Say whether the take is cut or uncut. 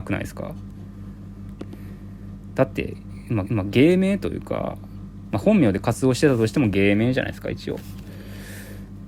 cut